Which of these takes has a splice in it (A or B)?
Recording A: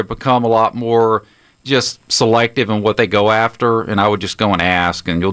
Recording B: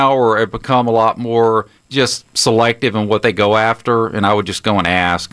B